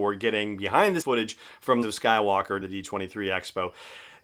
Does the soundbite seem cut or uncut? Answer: cut